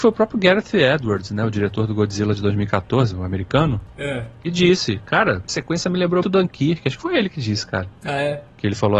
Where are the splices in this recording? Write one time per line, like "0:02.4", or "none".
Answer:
0:05.5
0:06.2

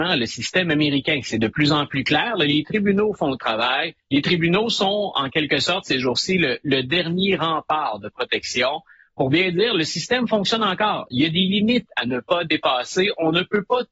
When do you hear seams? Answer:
0:04.0

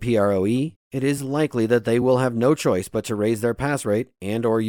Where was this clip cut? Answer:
none

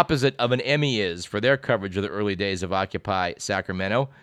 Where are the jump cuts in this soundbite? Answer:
none

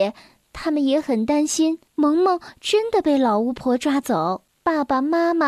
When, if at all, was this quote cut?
0:01.9
0:04.6

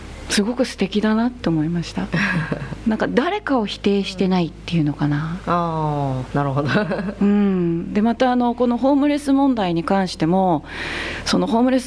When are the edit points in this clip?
none

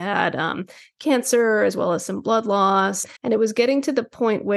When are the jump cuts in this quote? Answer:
0:03.2

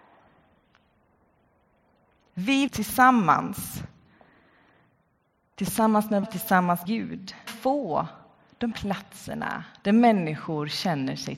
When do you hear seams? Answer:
0:02.7
0:06.2
0:06.8
0:07.5
0:08.7

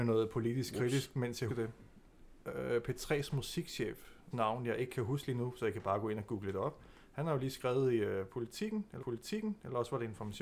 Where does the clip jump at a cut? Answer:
0:01.5
0:02.4
0:04.3
0:09.0

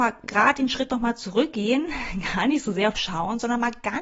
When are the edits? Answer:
0:02.9

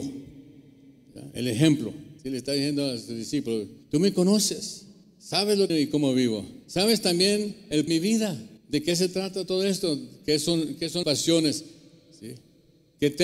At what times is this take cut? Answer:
0:02.2
0:03.8
0:05.0
0:05.7
0:06.6
0:07.9
0:08.6
0:11.0

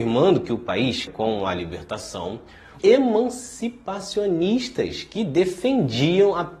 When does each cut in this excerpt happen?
0:01.1
0:02.8

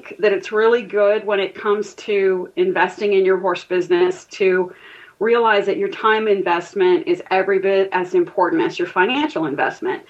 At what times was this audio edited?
none

